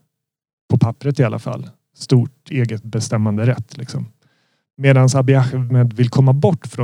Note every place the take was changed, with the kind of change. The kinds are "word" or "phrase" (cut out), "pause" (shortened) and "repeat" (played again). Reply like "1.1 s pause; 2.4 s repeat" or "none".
none

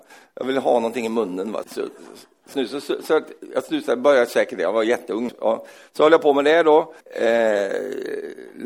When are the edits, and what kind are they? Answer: 1.6 s word; 2.5 s word; 5.3 s word; 7.0 s pause

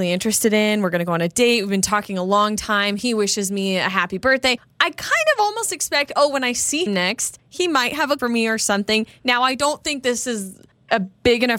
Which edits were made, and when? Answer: 6.9 s word; 8.2 s word

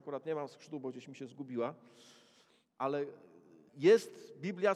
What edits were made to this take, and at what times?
3.7 s word

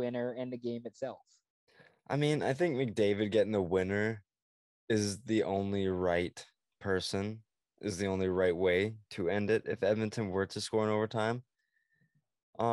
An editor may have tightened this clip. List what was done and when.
none

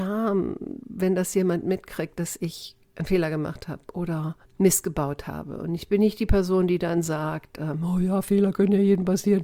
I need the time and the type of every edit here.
4.4 s pause

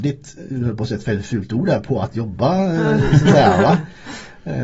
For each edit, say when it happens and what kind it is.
none

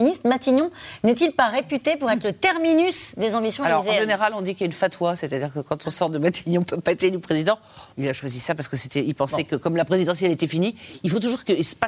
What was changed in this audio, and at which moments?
7.9 s pause

